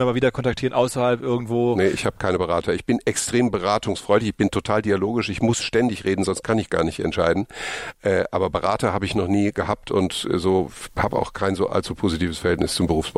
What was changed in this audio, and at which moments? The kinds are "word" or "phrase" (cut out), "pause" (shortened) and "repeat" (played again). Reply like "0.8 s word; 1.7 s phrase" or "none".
none